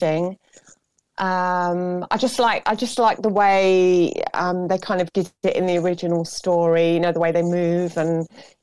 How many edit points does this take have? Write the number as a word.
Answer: zero